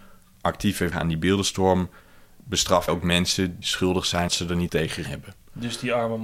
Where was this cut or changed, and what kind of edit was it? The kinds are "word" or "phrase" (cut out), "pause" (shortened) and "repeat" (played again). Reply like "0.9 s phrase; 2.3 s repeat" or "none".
0.9 s word; 2.9 s word; 3.6 s word; 4.3 s word; 4.7 s word; 5.1 s word